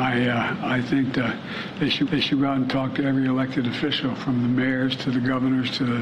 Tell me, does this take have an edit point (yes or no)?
yes